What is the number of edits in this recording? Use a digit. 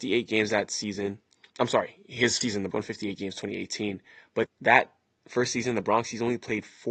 4